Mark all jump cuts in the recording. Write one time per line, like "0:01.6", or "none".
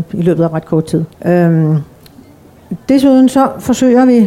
0:01.1